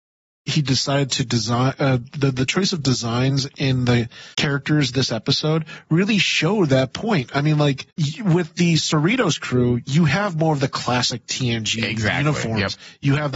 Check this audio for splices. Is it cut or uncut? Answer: cut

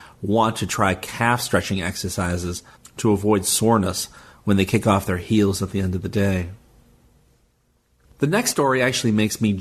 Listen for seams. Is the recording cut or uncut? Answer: uncut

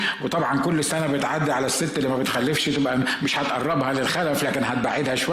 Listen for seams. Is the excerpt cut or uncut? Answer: uncut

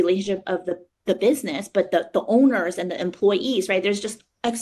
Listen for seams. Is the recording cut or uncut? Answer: uncut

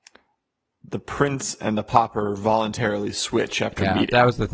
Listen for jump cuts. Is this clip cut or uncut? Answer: uncut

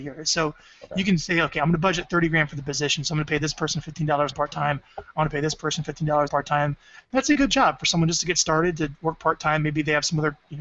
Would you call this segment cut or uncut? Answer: cut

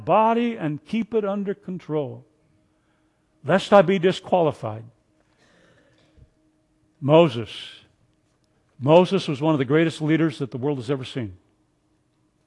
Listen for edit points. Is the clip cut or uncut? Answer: uncut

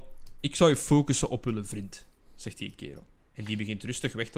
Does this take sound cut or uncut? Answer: cut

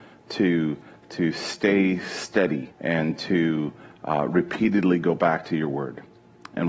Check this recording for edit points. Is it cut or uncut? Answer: cut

